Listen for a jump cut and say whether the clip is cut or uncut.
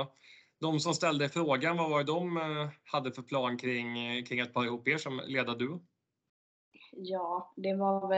uncut